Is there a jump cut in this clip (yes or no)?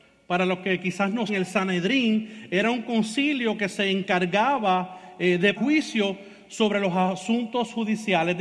yes